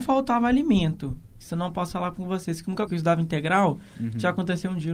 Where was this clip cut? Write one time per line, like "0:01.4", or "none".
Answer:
0:02.9